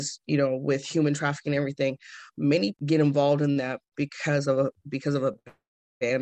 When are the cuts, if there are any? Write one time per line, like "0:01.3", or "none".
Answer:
0:02.7